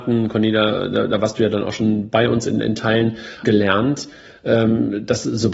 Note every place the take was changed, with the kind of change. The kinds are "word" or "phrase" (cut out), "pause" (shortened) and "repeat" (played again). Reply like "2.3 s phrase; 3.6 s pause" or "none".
3.4 s phrase